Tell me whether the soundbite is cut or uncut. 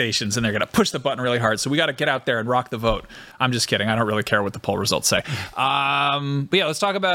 uncut